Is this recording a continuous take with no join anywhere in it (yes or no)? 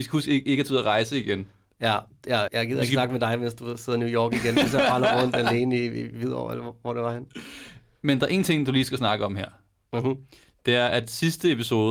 no